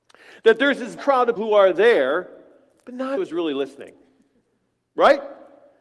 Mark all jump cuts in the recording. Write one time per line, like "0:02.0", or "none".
0:01.0
0:01.4
0:03.2